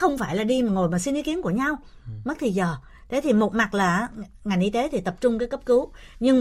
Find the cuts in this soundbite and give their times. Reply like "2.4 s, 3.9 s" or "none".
none